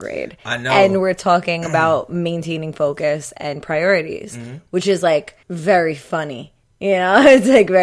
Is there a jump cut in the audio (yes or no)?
yes